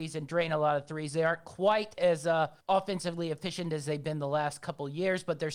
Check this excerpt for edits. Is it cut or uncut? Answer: cut